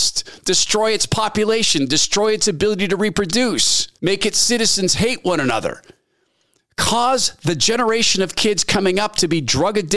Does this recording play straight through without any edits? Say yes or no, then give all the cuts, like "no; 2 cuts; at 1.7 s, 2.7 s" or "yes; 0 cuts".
no; 1 cut; at 4.0 s